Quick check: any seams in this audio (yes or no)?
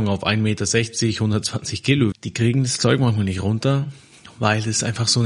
yes